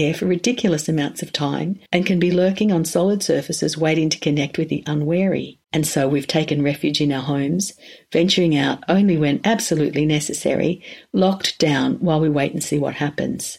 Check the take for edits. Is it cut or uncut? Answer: cut